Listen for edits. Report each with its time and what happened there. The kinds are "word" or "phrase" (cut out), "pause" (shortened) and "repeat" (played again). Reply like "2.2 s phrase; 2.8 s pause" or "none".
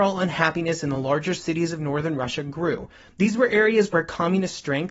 none